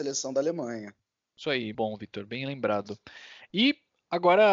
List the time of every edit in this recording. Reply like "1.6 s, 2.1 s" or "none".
1.7 s